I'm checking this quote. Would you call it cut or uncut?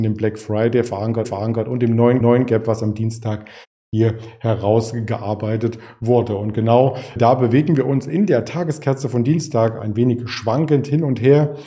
cut